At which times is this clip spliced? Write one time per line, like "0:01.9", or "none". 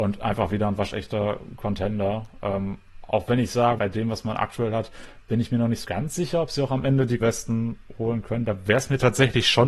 0:03.8
0:05.8
0:07.2